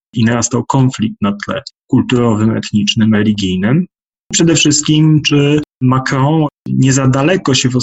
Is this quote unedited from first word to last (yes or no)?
yes